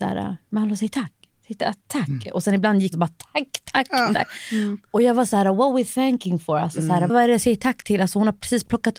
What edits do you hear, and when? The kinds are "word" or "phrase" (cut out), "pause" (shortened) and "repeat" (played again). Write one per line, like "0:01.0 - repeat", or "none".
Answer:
0:02.9 - phrase
0:07.1 - word